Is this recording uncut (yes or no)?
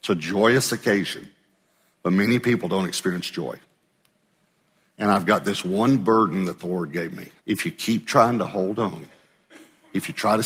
no